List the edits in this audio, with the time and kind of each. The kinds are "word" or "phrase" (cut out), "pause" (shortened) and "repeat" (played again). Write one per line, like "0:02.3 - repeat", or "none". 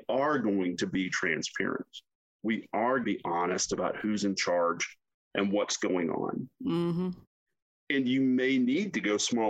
0:03.0 - word